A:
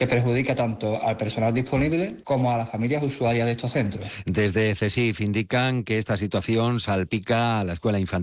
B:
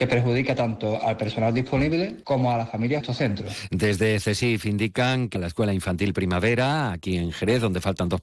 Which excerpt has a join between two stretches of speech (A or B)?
B